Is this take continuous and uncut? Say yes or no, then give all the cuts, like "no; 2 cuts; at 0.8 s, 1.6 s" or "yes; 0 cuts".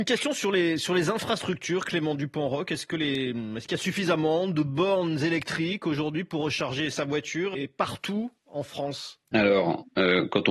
no; 3 cuts; at 7.5 s, 8.4 s, 9.2 s